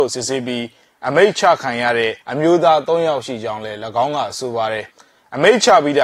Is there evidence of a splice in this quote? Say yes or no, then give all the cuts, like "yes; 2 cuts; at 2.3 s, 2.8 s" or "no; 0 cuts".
yes; 2 cuts; at 2.2 s, 4.9 s